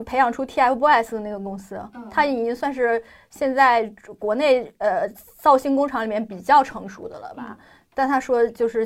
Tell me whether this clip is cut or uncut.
uncut